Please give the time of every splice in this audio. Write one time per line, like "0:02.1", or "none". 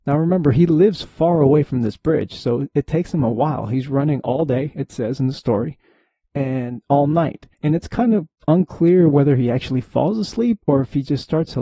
0:07.5